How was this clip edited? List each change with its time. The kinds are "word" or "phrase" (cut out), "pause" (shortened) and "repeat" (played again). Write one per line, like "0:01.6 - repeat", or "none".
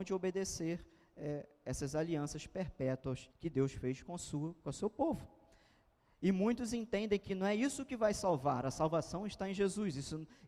0:03.3 - pause